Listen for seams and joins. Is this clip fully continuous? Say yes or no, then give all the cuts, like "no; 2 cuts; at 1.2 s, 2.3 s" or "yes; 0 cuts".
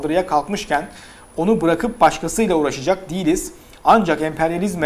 yes; 0 cuts